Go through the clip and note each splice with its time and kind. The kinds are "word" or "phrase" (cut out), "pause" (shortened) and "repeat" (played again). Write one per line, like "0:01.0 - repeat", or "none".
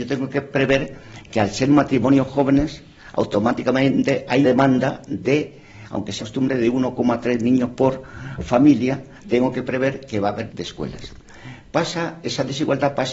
0:04.4 - word
0:06.2 - word
0:10.5 - word